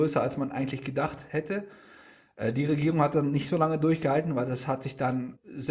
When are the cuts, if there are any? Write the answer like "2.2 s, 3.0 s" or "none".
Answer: none